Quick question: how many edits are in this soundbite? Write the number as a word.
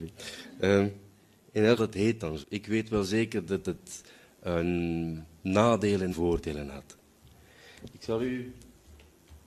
three